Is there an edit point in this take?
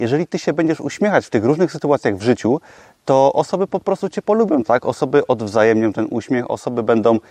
no; 0 cuts

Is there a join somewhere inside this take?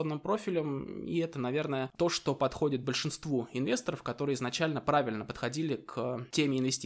no; 0 cuts

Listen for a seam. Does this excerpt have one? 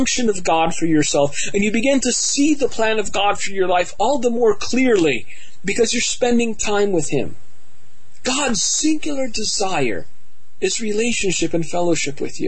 no; 0 cuts

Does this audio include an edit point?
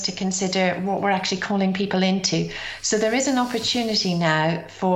no; 0 cuts

